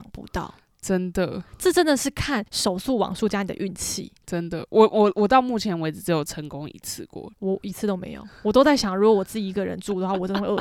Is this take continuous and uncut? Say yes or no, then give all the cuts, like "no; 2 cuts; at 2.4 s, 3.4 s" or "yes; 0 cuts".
no; 2 cuts; at 2.5 s, 7.3 s